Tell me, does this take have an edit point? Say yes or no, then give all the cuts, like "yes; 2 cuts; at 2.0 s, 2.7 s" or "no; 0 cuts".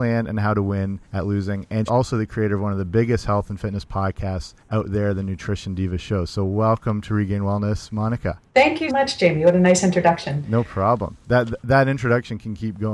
yes; 5 cuts; at 1.0 s, 1.9 s, 4.6 s, 8.5 s, 8.9 s